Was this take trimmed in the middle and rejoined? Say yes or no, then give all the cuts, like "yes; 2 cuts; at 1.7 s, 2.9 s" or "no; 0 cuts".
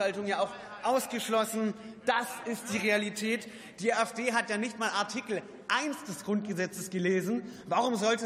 no; 0 cuts